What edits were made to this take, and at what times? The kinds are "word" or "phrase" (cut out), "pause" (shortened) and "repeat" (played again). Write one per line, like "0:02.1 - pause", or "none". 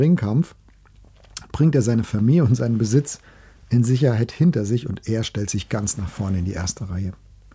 none